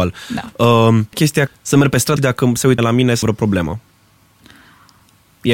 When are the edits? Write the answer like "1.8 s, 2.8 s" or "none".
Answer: 1.1 s, 1.5 s, 2.2 s, 2.8 s, 3.2 s